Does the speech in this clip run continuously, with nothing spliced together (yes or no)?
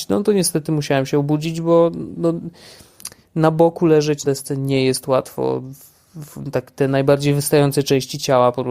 no